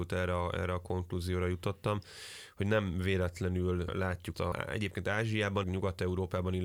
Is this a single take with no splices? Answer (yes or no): no